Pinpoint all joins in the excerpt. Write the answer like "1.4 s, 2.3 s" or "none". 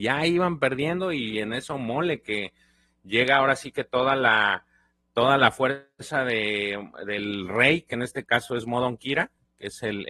none